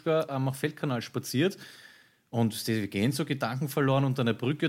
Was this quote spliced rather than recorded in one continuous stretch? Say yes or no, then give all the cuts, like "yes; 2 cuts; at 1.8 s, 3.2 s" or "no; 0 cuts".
no; 0 cuts